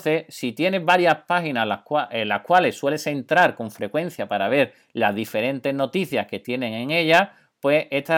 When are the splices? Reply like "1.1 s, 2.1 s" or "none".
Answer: none